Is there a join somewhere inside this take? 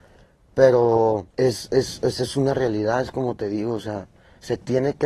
yes; 1 cut; at 1.3 s

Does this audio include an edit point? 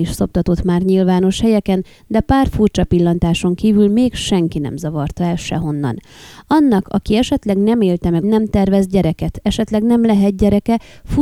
yes; 1 cut; at 8.2 s

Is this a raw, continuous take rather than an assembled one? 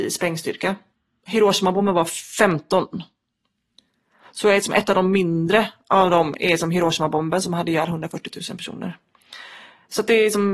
yes; 0 cuts

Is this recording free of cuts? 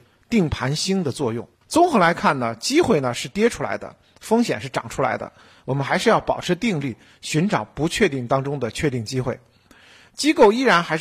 no; 1 cut; at 1.5 s

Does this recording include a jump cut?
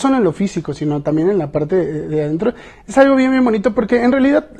no; 0 cuts

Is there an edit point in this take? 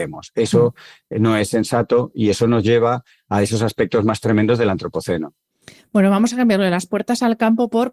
no; 0 cuts

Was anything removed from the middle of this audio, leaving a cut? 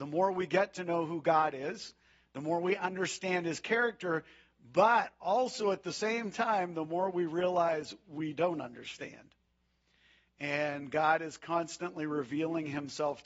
no; 0 cuts

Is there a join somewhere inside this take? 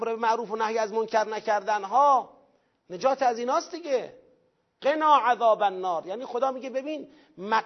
no; 0 cuts

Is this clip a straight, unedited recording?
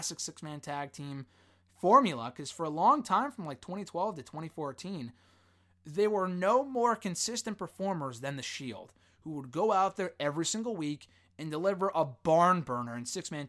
yes; 0 cuts

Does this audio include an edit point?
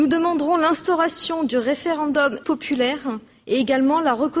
yes; 1 cut; at 2.4 s

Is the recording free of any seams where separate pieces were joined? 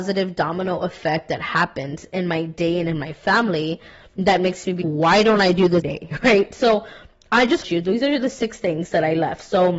no; 3 cuts; at 4.8 s, 5.8 s, 7.6 s

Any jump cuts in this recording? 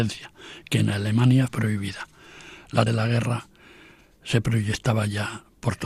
yes; 2 cuts; at 1.5 s, 2.9 s

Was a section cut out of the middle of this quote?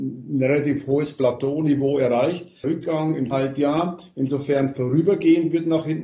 yes; 2 cuts; at 2.6 s, 3.3 s

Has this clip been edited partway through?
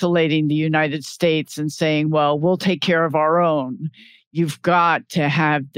no; 0 cuts

